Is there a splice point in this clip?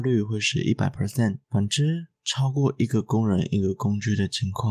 yes; 1 cut; at 1.4 s

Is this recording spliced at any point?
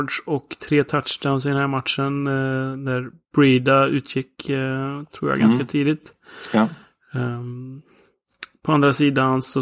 no; 0 cuts

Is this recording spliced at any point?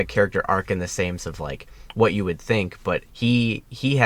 yes; 2 cuts; at 1.2 s, 3.1 s

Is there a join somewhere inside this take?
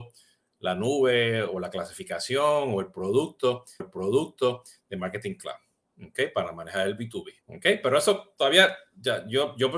yes; 2 cuts; at 3.8 s, 7.4 s

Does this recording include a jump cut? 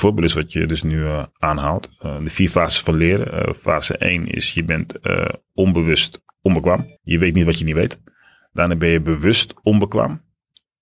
yes; 1 cut; at 7.0 s

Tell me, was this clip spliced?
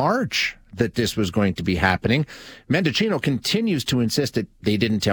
no; 0 cuts

